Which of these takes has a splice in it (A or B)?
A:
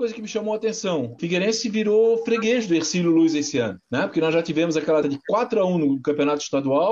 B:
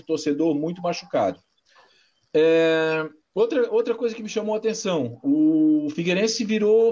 A